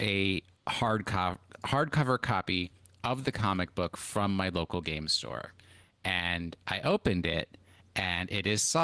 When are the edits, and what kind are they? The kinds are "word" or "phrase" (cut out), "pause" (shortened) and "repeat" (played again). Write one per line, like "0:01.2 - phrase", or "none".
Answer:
none